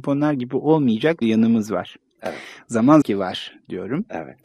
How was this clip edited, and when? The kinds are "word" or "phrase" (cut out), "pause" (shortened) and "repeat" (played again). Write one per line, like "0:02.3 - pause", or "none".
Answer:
0:01.2 - word
0:03.0 - phrase